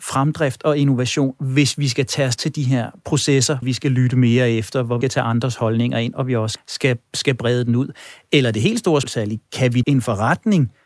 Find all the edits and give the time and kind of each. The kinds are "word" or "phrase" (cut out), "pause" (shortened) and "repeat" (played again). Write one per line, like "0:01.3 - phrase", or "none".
0:02.4 - word
0:03.6 - word
0:05.0 - word
0:06.6 - word
0:09.0 - word
0:09.8 - word